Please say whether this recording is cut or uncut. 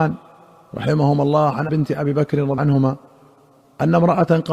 cut